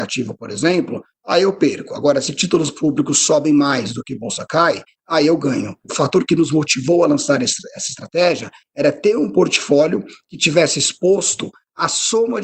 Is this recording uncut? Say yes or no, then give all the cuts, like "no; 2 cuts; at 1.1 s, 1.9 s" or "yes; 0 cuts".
yes; 0 cuts